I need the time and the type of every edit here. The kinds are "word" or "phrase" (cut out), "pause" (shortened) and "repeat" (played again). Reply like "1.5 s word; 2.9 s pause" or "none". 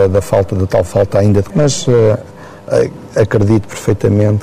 1.5 s word